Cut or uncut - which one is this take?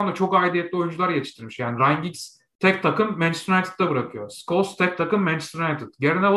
uncut